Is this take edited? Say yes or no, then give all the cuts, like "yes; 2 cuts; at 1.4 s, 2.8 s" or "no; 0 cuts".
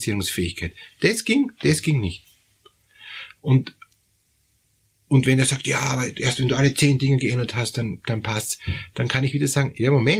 no; 0 cuts